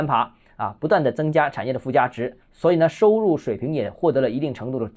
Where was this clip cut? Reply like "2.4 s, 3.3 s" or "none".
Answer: 2.4 s